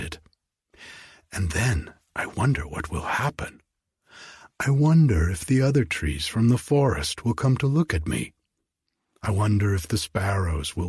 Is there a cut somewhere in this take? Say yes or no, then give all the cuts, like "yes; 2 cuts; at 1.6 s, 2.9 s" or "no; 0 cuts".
no; 0 cuts